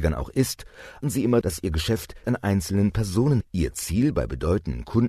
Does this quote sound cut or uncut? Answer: cut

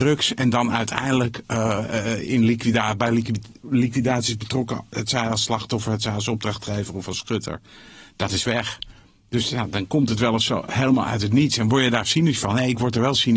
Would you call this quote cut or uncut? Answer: uncut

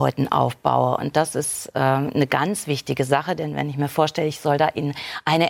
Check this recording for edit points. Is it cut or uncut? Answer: uncut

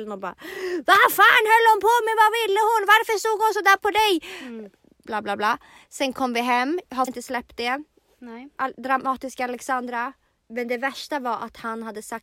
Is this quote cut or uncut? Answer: cut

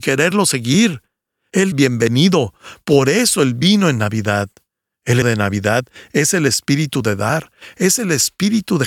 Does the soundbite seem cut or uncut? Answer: cut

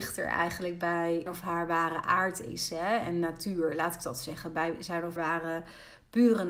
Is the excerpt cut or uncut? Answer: cut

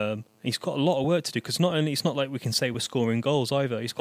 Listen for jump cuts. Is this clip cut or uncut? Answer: uncut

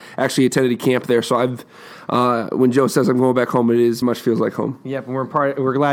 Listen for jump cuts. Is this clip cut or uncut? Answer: cut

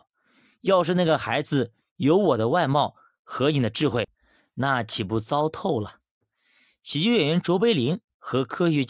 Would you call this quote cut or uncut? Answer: uncut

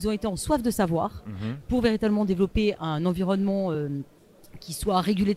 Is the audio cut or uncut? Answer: uncut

